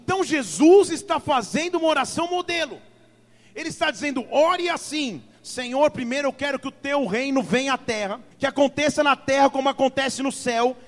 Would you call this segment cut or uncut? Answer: cut